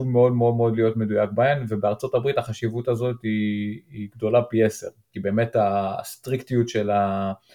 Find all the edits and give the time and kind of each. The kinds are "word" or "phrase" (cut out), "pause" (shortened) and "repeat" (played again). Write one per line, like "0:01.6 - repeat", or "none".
none

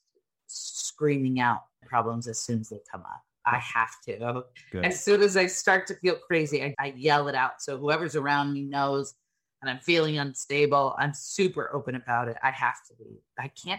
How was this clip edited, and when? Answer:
0:01.8 - word
0:06.7 - word

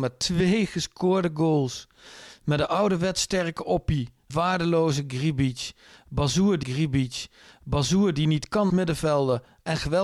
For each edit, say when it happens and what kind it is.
0:04.3 - word
0:06.6 - repeat
0:08.7 - word

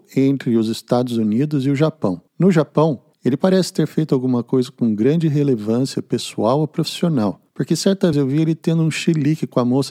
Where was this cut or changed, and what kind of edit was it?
0:02.3 - pause
0:03.1 - pause
0:07.5 - pause
0:08.1 - word

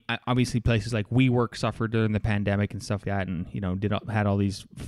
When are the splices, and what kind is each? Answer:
0:03.0 - word

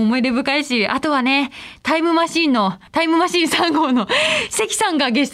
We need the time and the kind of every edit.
0:02.9 - pause

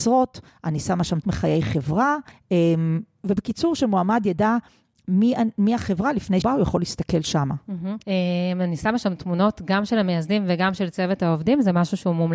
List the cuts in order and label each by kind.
0:01.2 - word
0:02.3 - pause
0:06.4 - word
0:08.0 - pause

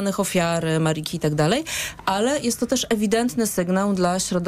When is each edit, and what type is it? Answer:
none

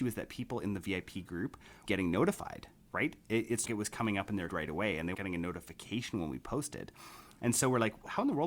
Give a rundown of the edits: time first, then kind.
0:01.9 - word
0:03.7 - word
0:04.5 - word
0:05.1 - word

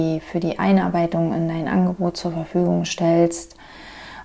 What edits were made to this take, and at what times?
none

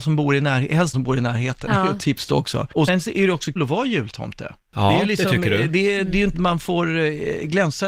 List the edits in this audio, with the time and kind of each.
0:00.9 - word
0:02.9 - word
0:03.6 - word
0:06.3 - word

